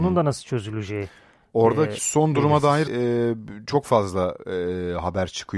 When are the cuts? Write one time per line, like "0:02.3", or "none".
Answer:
0:02.0
0:02.9